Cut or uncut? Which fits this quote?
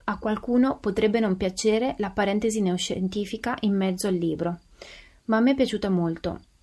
uncut